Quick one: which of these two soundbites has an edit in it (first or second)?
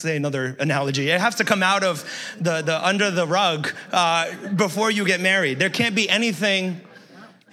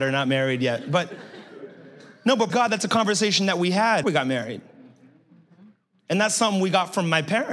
second